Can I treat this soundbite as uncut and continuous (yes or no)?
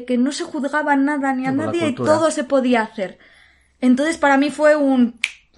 yes